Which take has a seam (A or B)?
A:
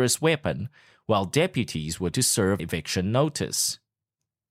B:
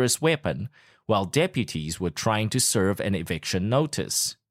A